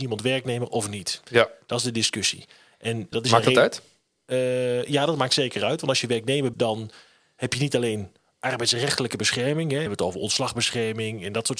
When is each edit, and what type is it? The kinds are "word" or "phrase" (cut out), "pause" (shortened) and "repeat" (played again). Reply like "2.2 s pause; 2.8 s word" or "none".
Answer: 3.1 s word; 6.5 s word; 9.9 s word